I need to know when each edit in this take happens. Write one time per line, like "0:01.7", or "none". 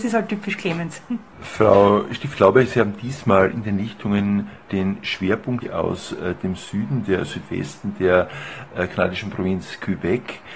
0:04.7